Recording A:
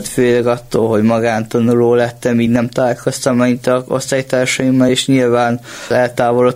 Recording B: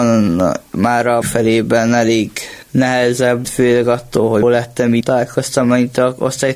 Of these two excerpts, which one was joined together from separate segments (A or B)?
B